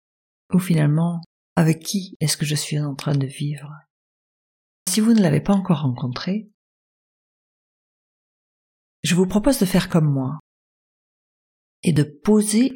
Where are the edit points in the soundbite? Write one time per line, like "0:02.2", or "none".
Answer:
0:04.9